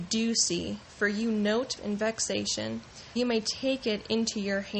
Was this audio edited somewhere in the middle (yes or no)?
yes